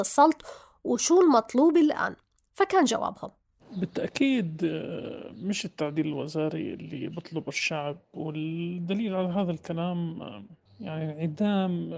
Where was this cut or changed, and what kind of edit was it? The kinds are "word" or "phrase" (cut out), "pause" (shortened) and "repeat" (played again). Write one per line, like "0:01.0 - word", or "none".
none